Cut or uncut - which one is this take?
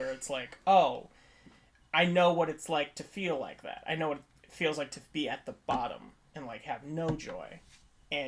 uncut